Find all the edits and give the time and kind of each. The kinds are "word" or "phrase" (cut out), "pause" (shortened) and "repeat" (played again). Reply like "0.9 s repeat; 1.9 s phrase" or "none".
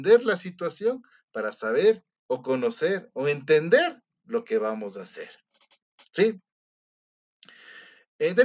2.2 s pause